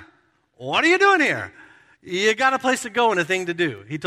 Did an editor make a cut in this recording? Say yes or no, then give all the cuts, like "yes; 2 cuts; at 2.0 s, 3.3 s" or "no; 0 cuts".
no; 0 cuts